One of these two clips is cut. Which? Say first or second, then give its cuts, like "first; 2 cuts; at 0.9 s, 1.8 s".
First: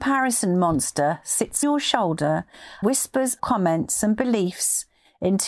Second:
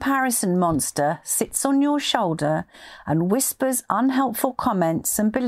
first; 3 cuts; at 1.6 s, 2.8 s, 3.4 s